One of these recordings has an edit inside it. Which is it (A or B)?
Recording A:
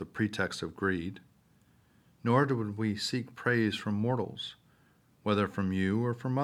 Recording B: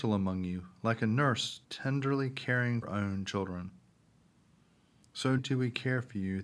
B